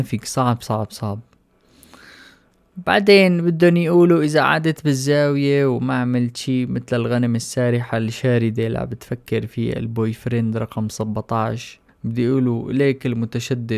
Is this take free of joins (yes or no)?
no